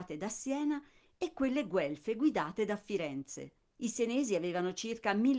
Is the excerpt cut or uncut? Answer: cut